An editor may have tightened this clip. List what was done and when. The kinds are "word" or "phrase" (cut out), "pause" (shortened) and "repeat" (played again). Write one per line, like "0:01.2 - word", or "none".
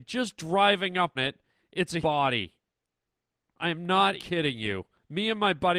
0:01.2 - word
0:02.0 - word
0:04.2 - word